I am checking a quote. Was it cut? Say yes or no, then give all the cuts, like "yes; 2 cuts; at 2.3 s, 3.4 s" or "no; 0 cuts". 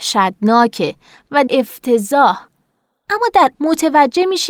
yes; 2 cuts; at 1.5 s, 3.5 s